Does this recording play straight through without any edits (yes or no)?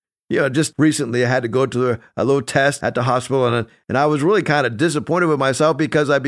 yes